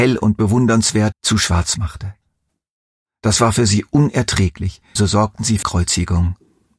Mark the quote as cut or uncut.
cut